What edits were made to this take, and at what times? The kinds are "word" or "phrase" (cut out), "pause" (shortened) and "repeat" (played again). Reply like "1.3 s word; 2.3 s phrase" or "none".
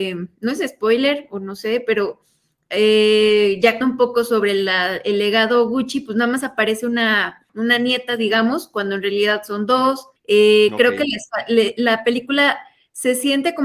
3.8 s word; 10.2 s pause